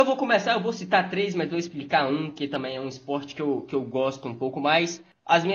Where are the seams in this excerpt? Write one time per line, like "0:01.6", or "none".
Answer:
none

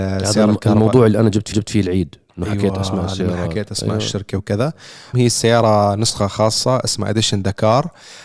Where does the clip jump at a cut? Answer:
0:01.5
0:05.1

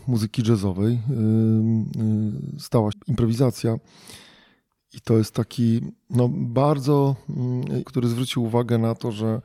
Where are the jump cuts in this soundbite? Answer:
0:02.9
0:07.8

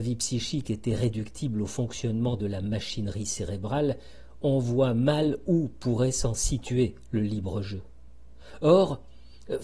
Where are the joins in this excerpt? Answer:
none

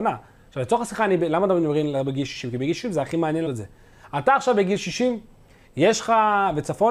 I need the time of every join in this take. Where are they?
0:03.5

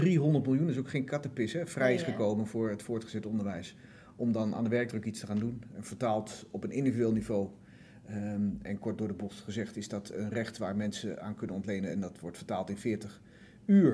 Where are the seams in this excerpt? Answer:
none

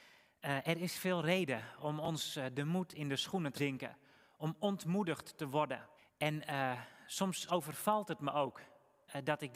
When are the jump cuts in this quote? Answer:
0:03.5
0:06.0
0:07.5

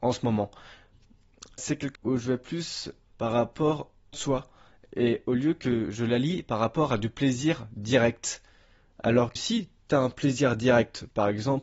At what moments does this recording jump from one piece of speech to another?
0:01.6
0:01.9
0:03.1
0:04.1
0:09.4

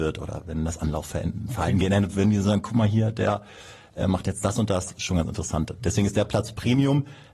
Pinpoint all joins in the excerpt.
none

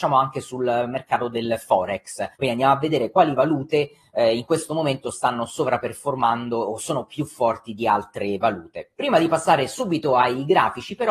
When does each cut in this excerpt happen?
0:02.3

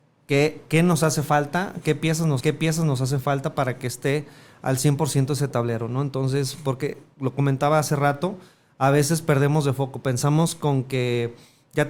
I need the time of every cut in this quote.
0:02.4

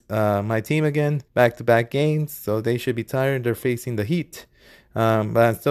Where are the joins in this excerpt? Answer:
0:01.3

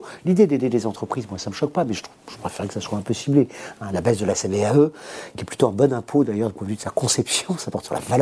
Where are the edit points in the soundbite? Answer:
none

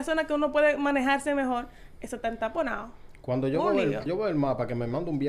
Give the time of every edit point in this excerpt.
0:04.1

